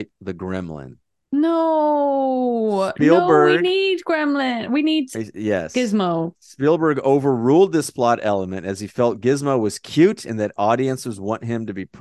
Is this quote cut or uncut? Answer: uncut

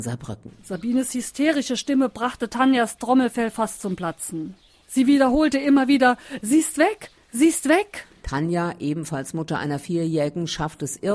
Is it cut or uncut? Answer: uncut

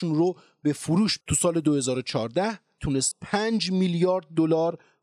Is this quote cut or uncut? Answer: cut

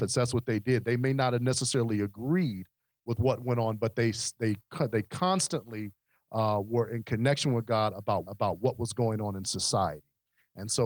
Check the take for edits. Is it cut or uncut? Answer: cut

